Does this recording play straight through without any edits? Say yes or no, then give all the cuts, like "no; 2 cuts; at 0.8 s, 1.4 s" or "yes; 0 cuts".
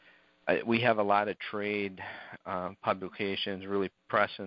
yes; 0 cuts